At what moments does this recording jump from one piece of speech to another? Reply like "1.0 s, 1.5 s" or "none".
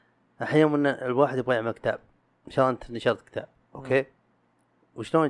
none